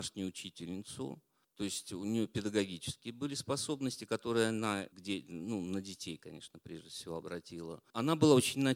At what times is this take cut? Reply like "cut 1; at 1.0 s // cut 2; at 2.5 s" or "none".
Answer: none